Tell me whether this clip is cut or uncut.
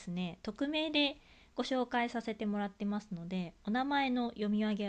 uncut